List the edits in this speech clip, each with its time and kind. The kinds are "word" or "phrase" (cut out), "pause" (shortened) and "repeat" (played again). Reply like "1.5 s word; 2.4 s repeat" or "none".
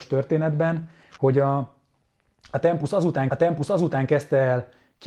3.3 s repeat